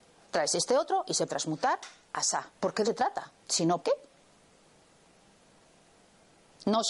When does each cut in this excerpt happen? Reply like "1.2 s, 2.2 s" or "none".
1.3 s, 2.5 s, 2.8 s, 3.4 s, 3.8 s

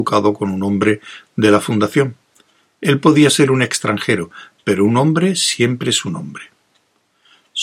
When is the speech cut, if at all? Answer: none

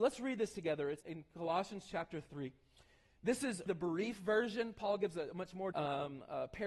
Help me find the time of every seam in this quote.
1.0 s, 3.7 s, 5.7 s

